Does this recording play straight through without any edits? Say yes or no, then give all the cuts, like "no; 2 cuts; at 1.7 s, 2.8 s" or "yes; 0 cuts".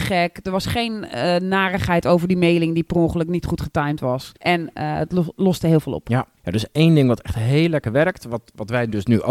no; 2 cuts; at 4.4 s, 6.4 s